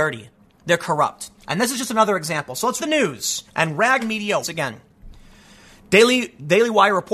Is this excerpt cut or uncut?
cut